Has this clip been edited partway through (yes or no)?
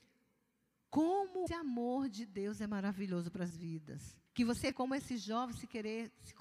yes